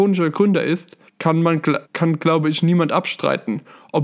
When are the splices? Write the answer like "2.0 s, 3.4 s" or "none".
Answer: 1.1 s, 1.8 s